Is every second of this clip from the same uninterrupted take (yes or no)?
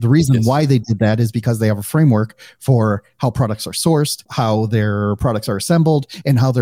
yes